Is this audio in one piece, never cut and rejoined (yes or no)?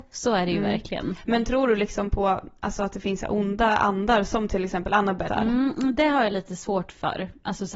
no